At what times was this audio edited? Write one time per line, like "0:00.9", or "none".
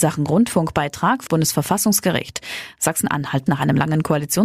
0:01.3
0:03.5